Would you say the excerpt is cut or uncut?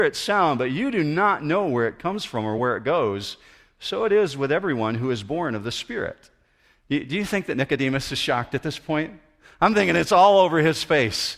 uncut